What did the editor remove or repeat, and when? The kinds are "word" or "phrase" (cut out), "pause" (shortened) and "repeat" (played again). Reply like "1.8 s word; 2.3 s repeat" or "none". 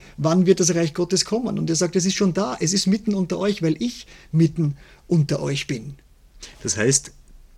none